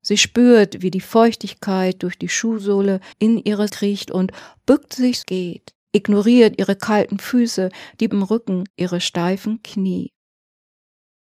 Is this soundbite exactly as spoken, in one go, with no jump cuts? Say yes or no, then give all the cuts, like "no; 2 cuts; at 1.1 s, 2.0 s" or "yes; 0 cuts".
no; 6 cuts; at 3.1 s, 3.7 s, 5.2 s, 5.8 s, 8.1 s, 8.7 s